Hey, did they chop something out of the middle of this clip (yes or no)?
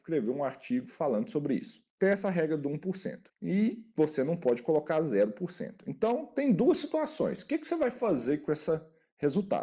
yes